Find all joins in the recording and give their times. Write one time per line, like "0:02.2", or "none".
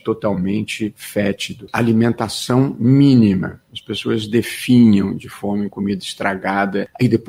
0:05.7